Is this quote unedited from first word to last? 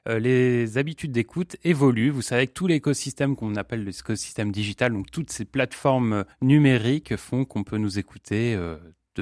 no; 1 cut; at 6.3 s

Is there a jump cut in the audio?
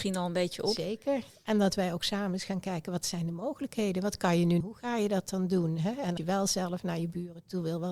yes; 2 cuts; at 4.6 s, 6.2 s

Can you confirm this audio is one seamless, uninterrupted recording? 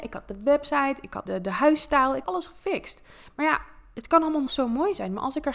no; 3 cuts; at 1.3 s, 2.2 s, 4.5 s

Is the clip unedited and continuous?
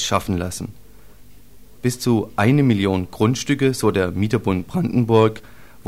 yes; 0 cuts

